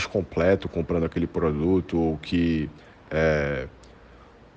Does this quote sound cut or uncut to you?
cut